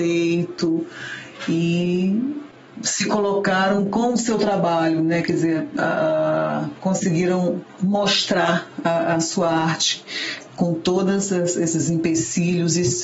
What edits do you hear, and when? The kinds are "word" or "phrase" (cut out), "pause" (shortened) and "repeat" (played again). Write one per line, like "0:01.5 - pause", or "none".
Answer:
none